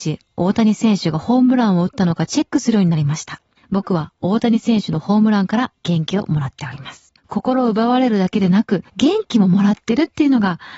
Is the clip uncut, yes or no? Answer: no